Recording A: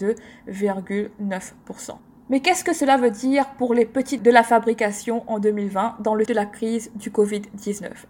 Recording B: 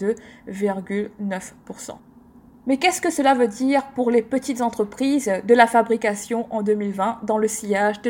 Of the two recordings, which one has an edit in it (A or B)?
A